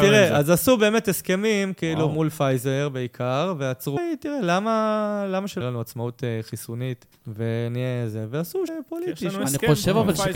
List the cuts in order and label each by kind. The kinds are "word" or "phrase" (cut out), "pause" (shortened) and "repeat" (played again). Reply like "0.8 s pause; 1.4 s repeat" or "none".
4.0 s phrase; 5.6 s phrase; 7.1 s pause; 8.7 s word